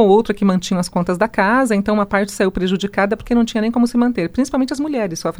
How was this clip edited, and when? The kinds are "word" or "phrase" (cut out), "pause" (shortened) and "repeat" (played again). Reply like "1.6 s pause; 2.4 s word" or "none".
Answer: none